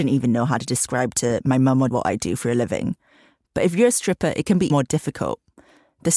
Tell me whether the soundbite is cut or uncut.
cut